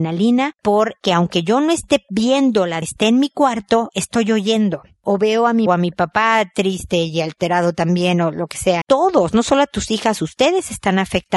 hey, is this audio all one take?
no; 3 cuts; at 2.8 s, 5.7 s, 8.8 s

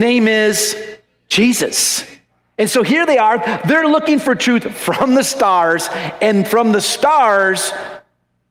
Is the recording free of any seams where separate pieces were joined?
yes; 0 cuts

